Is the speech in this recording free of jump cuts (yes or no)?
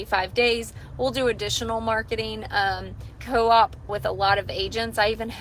no